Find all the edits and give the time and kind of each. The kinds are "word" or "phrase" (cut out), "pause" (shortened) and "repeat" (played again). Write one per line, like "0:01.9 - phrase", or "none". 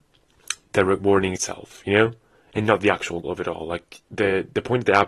0:01.4 - word
0:03.2 - word